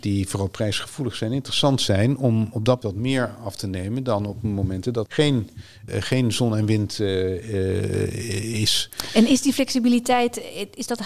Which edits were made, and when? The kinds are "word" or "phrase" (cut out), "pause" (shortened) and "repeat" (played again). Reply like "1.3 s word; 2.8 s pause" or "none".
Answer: 2.8 s word; 5.1 s word; 5.9 s word